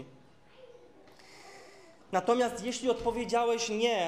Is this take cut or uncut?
uncut